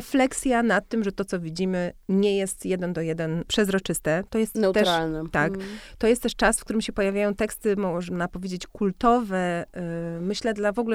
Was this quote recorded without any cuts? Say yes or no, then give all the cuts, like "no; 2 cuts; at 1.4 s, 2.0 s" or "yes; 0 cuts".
no; 1 cut; at 3.5 s